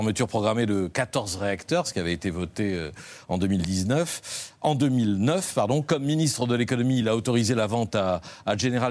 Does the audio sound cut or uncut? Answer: uncut